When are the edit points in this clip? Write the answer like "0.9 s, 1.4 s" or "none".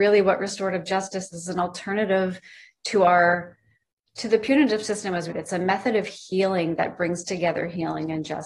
1.3 s, 5.3 s

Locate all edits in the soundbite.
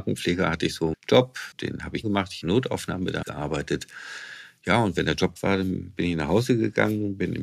0.9 s, 1.5 s, 2.0 s, 2.4 s, 3.2 s, 5.4 s

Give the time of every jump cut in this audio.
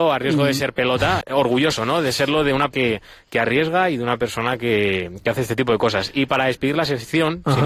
1.2 s, 2.7 s

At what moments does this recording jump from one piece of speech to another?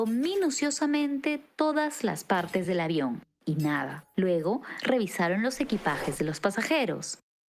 none

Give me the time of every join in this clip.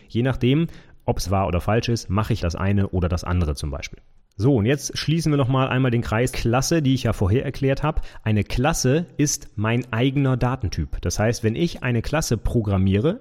1.2 s, 2.4 s, 4.2 s, 6.3 s

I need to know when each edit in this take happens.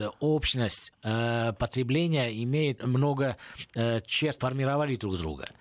0.9 s, 2.8 s, 4.4 s

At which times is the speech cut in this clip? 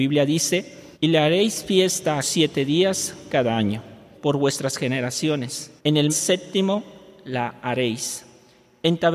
0.9 s, 2.2 s, 4.1 s, 5.8 s, 6.1 s

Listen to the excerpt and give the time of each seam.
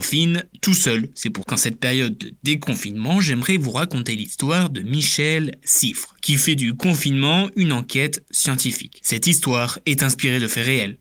1.4 s

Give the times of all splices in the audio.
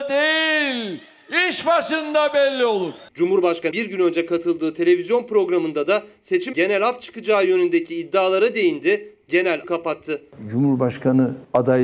3.7 s, 6.5 s, 9.6 s

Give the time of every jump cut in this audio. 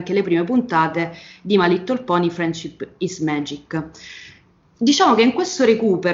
none

